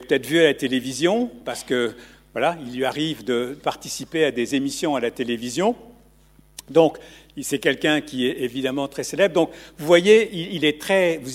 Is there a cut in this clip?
no; 0 cuts

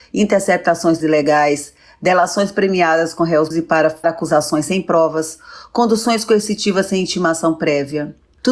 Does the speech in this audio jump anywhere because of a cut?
yes; 3 cuts; at 1.0 s, 3.5 s, 4.0 s

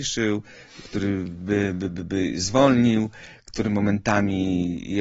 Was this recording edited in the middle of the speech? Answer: no; 0 cuts

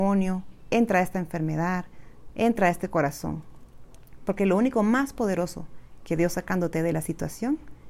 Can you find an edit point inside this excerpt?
no; 0 cuts

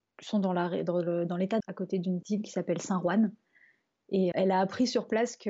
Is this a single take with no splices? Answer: no; 3 cuts; at 1.6 s, 2.2 s, 4.3 s

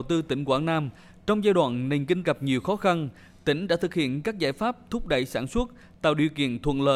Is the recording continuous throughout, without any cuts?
no; 1 cut; at 2.2 s

